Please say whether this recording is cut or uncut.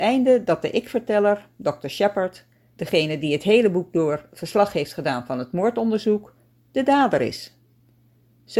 uncut